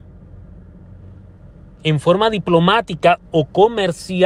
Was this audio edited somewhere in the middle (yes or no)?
no